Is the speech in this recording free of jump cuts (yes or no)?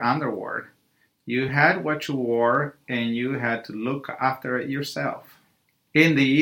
yes